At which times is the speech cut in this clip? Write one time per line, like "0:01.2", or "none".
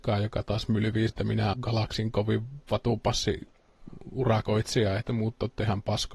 0:01.1
0:01.5
0:05.0